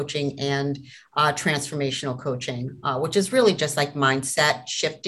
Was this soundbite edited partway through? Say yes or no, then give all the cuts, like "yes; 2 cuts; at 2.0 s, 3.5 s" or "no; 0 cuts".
no; 0 cuts